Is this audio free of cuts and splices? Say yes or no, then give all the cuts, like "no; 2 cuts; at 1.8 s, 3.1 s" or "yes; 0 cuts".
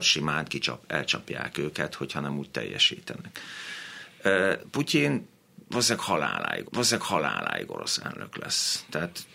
no; 1 cut; at 6.7 s